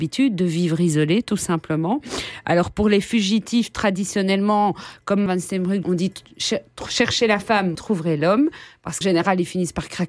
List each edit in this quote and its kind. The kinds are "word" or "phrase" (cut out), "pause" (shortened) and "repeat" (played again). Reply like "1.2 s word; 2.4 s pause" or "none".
5.3 s word; 5.8 s phrase; 7.7 s word; 9.0 s word